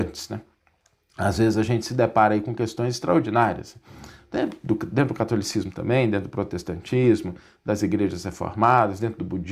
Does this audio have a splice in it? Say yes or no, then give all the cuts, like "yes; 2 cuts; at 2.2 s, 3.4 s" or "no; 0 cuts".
no; 0 cuts